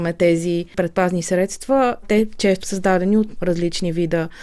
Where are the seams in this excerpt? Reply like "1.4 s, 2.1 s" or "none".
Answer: 2.0 s, 2.6 s, 3.4 s